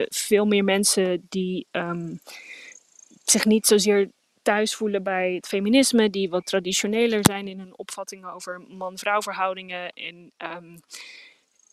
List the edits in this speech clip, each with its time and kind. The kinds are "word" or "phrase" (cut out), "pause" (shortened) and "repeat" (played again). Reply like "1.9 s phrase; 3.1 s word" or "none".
none

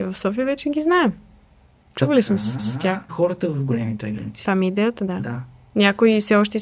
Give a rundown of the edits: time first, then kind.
2.6 s repeat; 3.1 s phrase

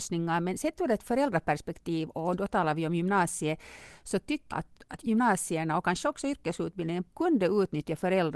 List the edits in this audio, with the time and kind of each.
4.5 s word; 7.1 s pause

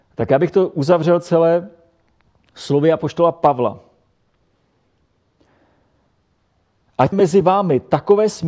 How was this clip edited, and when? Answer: 7.1 s word

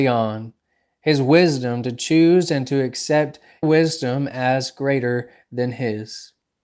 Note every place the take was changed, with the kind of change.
3.6 s word

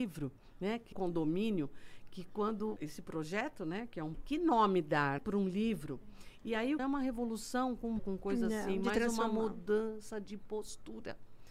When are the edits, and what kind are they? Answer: 0.9 s phrase; 2.8 s word; 4.1 s phrase; 5.2 s word; 6.8 s phrase; 8.0 s word

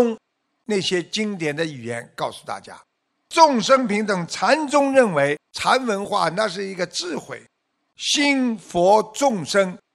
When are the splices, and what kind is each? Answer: 5.5 s pause

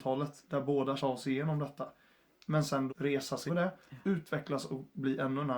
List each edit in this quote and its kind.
1.0 s phrase; 2.9 s word; 3.5 s word

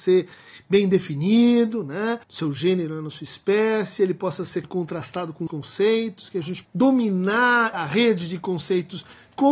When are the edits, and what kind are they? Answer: 2.2 s pause; 4.6 s word; 5.5 s word; 6.6 s word; 7.7 s word

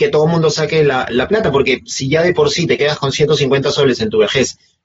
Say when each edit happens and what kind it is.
none

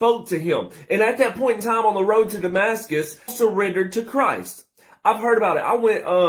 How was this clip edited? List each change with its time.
3.3 s word

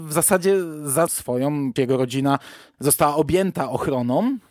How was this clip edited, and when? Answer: 1.1 s word; 1.8 s word

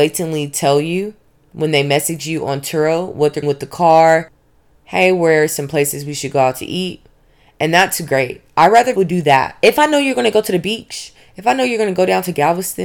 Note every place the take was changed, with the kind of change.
3.4 s phrase; 9.0 s word

